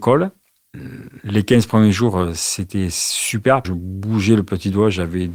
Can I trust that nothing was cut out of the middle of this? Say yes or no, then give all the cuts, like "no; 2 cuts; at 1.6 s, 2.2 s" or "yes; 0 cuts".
no; 1 cut; at 3.6 s